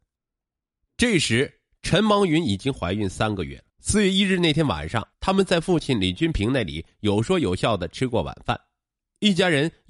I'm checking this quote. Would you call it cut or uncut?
cut